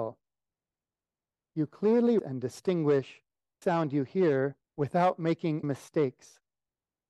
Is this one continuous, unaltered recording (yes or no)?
no